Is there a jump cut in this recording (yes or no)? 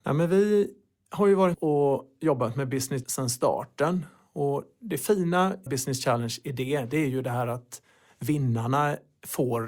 yes